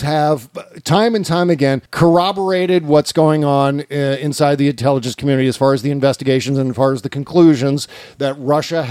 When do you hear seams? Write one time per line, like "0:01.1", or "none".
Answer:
0:01.9

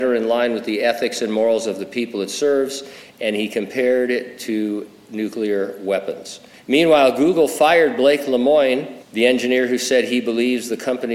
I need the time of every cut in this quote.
0:06.5
0:09.0

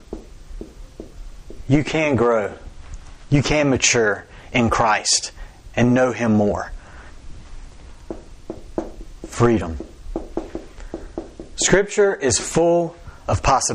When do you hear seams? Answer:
none

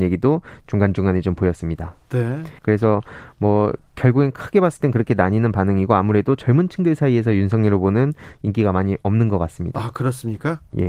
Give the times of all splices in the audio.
0:02.6

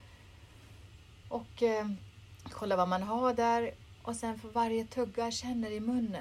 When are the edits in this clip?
none

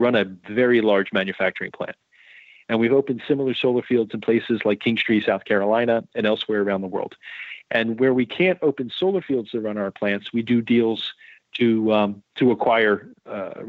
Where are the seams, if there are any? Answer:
none

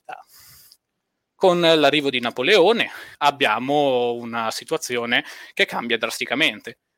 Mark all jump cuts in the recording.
0:03.1

